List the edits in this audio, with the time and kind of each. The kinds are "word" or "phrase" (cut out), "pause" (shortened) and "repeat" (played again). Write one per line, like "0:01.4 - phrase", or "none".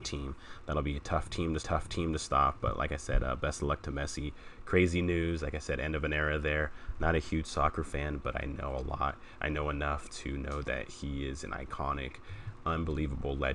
0:01.6 - repeat